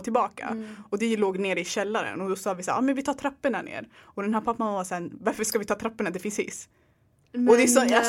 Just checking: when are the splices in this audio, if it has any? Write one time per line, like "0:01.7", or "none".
none